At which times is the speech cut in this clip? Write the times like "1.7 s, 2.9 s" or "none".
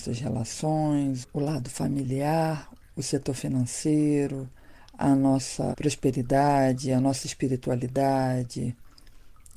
none